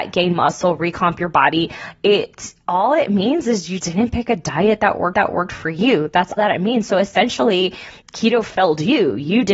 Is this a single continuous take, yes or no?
no